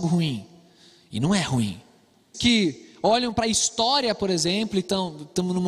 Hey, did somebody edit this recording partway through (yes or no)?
yes